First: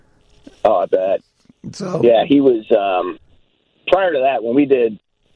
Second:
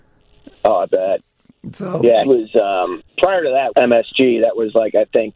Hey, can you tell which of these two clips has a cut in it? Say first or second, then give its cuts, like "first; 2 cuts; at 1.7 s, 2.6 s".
second; 3 cuts; at 2.2 s, 3.1 s, 3.7 s